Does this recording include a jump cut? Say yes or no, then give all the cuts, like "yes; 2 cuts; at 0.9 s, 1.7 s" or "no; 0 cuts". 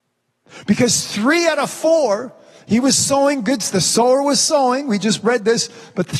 no; 0 cuts